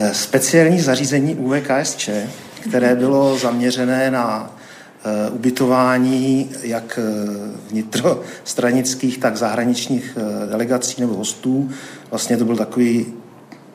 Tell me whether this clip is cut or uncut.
uncut